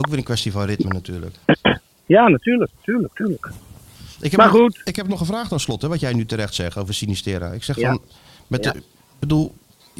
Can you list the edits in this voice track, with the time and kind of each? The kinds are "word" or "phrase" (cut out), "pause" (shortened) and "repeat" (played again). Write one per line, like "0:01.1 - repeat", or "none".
none